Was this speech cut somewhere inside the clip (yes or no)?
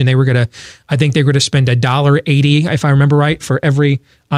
no